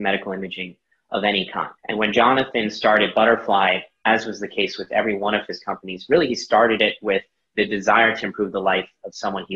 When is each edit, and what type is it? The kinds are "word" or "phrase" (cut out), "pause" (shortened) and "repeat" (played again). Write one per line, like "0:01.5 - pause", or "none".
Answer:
0:01.8 - pause

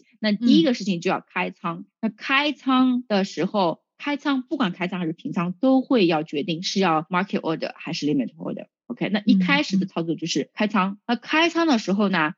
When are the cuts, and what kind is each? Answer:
none

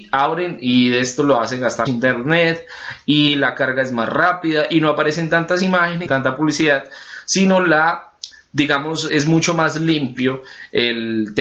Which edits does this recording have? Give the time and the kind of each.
0:01.9 - word
0:06.1 - word
0:09.1 - word

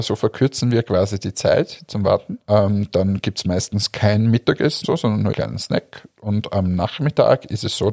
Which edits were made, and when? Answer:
0:02.4 - pause
0:04.8 - word
0:05.3 - word

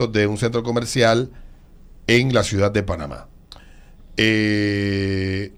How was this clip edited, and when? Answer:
none

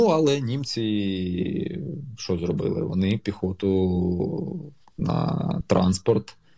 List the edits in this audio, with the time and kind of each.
0:03.2 - word

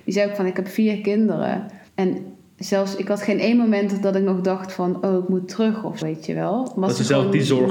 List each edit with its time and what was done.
0:01.9 - pause
0:06.0 - word

